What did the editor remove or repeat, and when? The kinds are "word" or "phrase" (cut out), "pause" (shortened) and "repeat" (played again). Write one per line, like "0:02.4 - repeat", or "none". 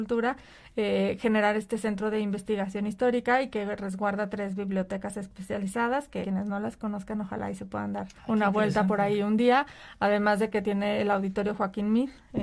0:06.2 - word
0:08.2 - pause
0:10.6 - word